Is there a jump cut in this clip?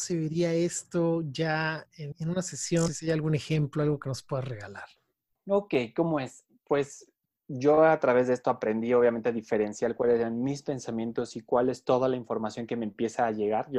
yes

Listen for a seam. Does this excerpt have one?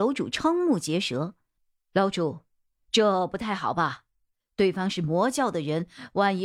no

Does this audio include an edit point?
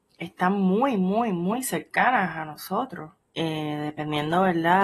yes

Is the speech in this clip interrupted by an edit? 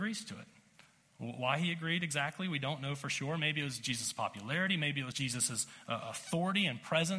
yes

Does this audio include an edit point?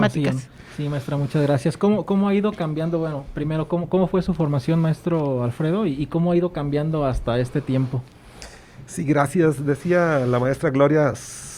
no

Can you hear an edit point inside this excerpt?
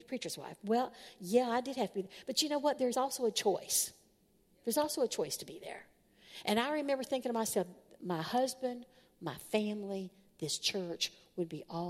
no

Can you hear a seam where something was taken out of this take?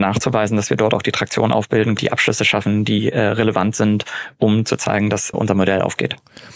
yes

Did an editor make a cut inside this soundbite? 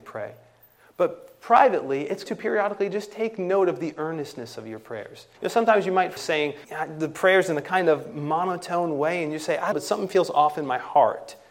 yes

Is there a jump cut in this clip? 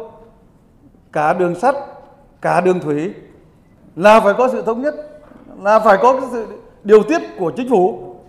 no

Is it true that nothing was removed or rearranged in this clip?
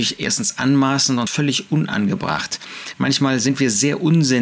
no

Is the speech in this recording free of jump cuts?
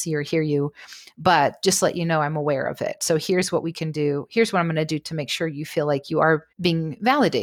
no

